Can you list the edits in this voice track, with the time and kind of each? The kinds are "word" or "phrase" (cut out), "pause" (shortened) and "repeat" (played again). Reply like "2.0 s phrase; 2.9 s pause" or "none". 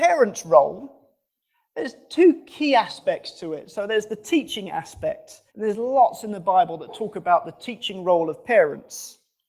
5.5 s pause